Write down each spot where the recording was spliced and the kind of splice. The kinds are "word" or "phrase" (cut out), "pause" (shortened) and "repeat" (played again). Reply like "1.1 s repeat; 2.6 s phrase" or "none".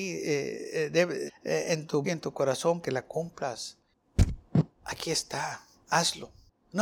1.3 s word; 2.0 s word; 2.8 s word; 4.7 s pause